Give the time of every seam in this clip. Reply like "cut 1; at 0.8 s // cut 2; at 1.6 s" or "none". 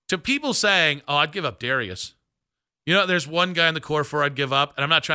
none